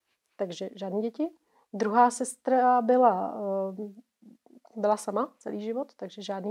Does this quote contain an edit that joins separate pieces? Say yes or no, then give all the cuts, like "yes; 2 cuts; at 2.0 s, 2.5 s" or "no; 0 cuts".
no; 0 cuts